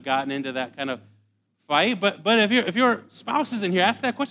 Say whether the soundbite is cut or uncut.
uncut